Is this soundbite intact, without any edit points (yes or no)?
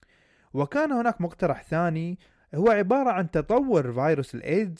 yes